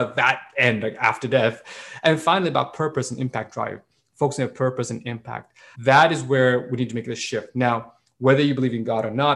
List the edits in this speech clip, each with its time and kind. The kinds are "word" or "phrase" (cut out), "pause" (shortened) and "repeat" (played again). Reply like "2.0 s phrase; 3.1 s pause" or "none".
5.7 s word